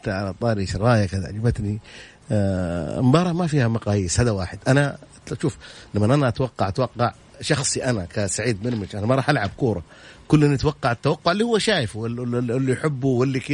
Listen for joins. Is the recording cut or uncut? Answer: uncut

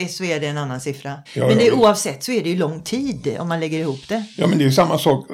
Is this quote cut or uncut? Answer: cut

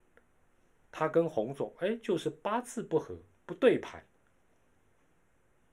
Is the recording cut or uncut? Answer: uncut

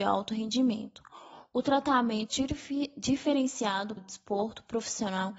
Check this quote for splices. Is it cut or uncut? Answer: cut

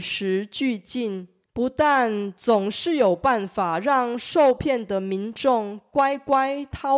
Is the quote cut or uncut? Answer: cut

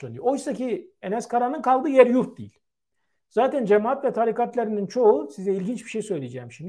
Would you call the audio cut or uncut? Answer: uncut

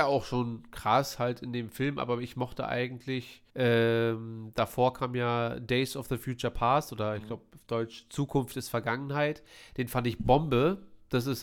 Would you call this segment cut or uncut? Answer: cut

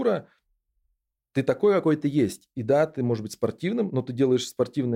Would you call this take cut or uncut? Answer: uncut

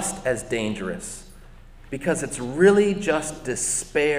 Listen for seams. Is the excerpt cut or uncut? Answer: uncut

